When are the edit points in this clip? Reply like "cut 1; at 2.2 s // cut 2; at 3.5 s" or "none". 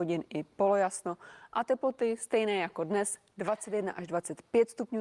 none